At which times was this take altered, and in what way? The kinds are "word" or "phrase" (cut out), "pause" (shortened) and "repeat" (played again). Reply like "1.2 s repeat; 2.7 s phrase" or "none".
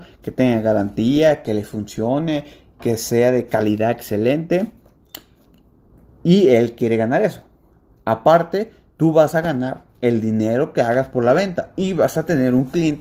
none